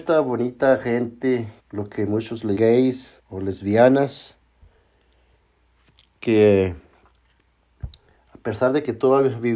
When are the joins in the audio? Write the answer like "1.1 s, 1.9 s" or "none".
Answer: 1.6 s, 2.6 s, 3.2 s